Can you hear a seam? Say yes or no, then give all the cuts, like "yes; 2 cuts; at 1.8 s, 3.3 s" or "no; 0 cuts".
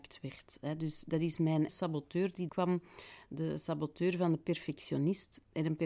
yes; 2 cuts; at 1.7 s, 2.5 s